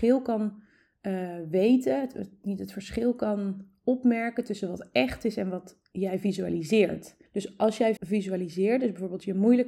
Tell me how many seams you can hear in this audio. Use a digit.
2